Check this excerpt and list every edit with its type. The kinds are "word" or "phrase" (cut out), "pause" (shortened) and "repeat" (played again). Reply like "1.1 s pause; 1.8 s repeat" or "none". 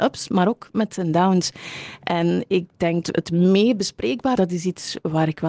3.0 s word; 4.4 s word